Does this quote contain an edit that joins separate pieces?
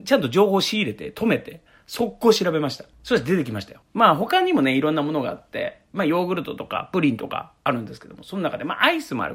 no; 0 cuts

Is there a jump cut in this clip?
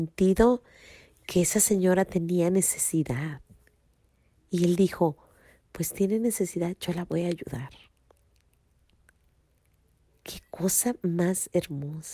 no; 0 cuts

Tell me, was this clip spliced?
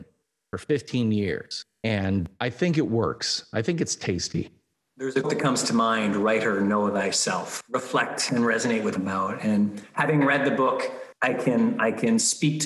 yes; 3 cuts; at 5.2 s, 9.0 s, 11.2 s

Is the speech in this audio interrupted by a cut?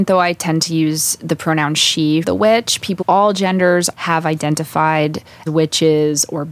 yes; 4 cuts; at 2.2 s, 3.0 s, 3.9 s, 5.5 s

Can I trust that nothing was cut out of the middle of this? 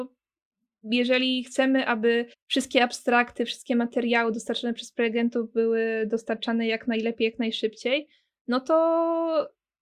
no; 1 cut; at 2.3 s

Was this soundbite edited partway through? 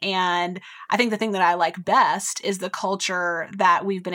no; 0 cuts

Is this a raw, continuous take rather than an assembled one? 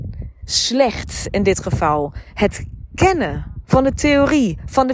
no; 1 cut; at 3.6 s

